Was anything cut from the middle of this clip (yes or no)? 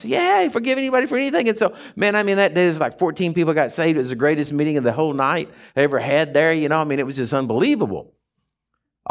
no